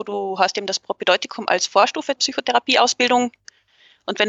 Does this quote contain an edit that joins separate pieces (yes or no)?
yes